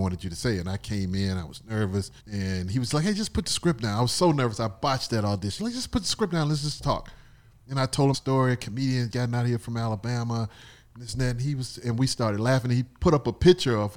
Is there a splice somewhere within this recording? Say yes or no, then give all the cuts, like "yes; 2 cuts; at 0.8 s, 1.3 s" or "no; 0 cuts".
yes; 4 cuts; at 2.2 s, 5.6 s, 8.1 s, 9.1 s